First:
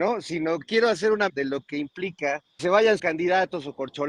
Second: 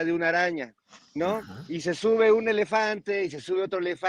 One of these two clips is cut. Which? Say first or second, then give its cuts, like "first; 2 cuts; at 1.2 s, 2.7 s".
first; 3 cuts; at 1.3 s, 2.6 s, 3.0 s